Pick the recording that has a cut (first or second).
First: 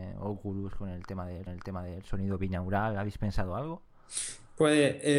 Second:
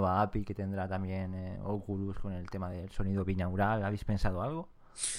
first